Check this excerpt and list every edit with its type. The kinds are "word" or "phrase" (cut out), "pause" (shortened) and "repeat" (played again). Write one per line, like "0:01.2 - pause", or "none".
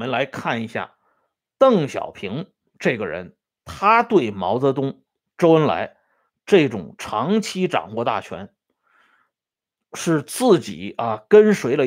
none